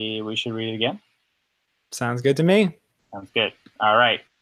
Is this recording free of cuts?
yes; 0 cuts

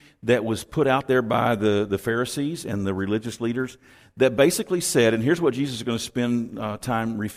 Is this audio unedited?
yes; 0 cuts

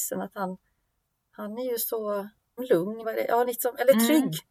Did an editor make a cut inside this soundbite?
yes; 3 cuts; at 2.6 s, 3.0 s, 3.5 s

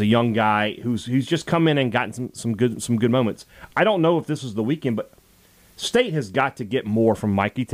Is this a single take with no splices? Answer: yes; 0 cuts

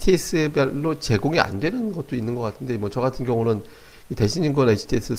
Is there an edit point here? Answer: no; 0 cuts

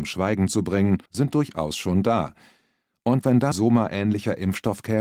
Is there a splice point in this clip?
yes; 2 cuts; at 1.1 s, 3.5 s

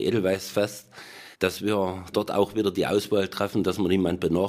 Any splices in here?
yes; 2 cuts; at 1.3 s, 2.1 s

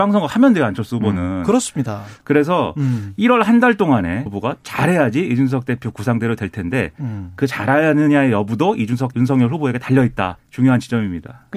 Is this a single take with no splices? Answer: no; 3 cuts; at 4.3 s, 9.1 s, 10.4 s

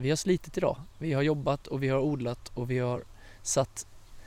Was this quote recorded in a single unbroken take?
yes; 0 cuts

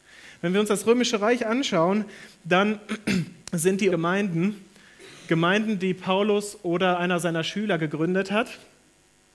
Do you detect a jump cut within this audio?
yes; 2 cuts; at 3.4 s, 3.9 s

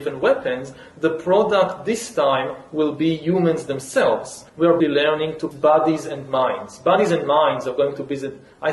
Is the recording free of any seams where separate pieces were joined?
no; 3 cuts; at 4.5 s, 4.8 s, 5.5 s

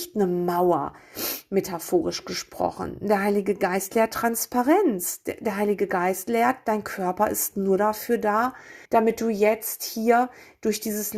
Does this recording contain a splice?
yes; 1 cut; at 8.8 s

